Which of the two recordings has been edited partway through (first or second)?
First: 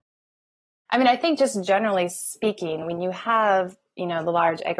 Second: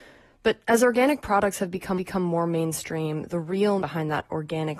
second